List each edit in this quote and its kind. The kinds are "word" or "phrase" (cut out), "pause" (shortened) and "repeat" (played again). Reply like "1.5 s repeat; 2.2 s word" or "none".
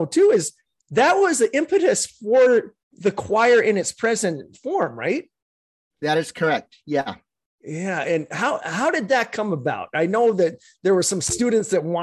2.8 s pause